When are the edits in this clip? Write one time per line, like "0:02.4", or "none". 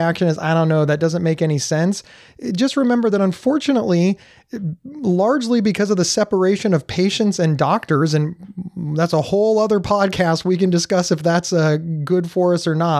none